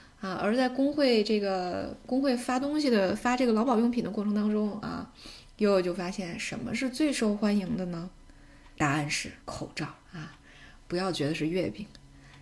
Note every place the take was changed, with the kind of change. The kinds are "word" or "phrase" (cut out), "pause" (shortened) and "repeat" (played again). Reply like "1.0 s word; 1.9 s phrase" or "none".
8.7 s pause; 9.4 s pause; 10.0 s pause